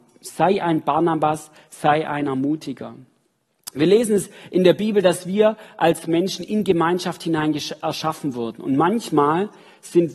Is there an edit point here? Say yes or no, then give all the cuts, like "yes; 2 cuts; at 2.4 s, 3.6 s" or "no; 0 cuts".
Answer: no; 0 cuts